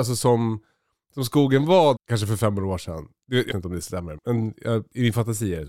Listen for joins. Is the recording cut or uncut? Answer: cut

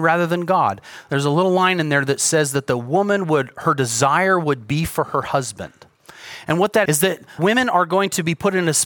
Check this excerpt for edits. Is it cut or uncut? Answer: cut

